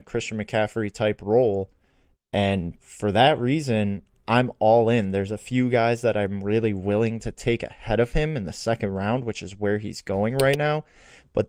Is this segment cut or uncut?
uncut